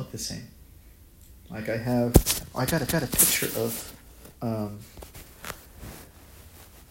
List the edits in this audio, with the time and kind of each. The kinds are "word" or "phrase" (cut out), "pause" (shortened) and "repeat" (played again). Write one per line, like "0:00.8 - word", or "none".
0:02.9 - repeat
0:04.3 - pause